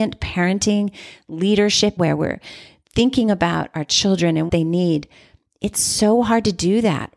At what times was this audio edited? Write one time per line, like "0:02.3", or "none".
0:02.0
0:04.5